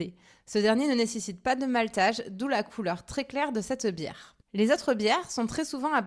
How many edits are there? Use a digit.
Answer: 1